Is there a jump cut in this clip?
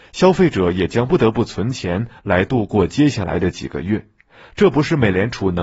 no; 0 cuts

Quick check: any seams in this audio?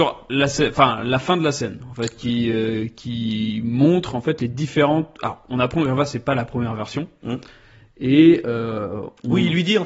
no; 0 cuts

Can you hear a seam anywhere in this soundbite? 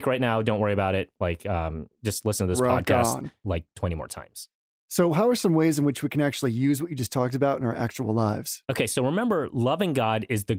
no; 0 cuts

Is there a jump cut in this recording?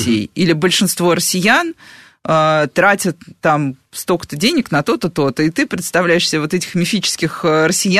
no; 0 cuts

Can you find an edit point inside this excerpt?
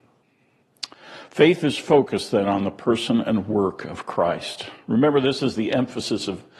no; 0 cuts

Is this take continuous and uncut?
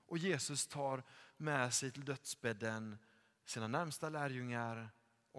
yes; 0 cuts

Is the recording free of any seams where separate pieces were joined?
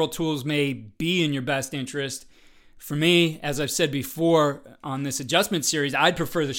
yes; 0 cuts

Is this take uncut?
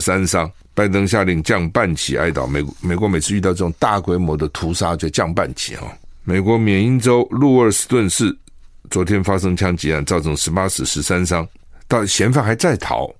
yes; 0 cuts

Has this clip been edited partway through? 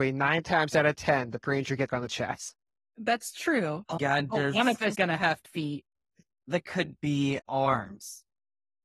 yes; 7 cuts; at 1.4 s, 1.9 s, 4.0 s, 4.9 s, 5.4 s, 6.6 s, 7.5 s

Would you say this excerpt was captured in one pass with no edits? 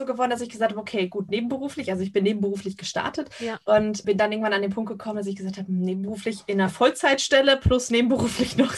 no; 1 cut; at 4.0 s

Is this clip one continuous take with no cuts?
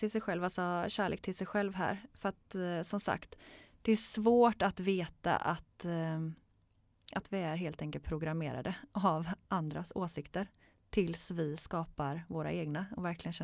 yes; 0 cuts

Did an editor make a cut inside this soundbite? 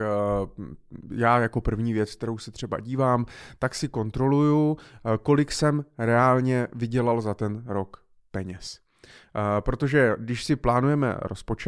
no; 0 cuts

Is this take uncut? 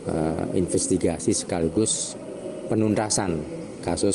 yes; 0 cuts

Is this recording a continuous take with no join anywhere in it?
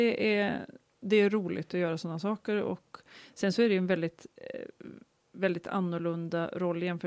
yes; 0 cuts

